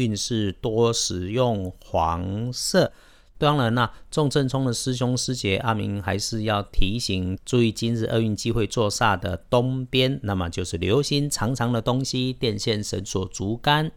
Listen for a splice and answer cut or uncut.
uncut